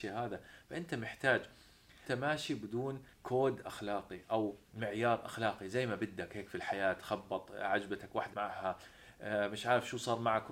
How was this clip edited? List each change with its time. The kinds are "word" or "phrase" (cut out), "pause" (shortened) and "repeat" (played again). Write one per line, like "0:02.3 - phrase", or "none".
0:02.1 - phrase
0:03.1 - pause
0:04.6 - pause
0:08.3 - word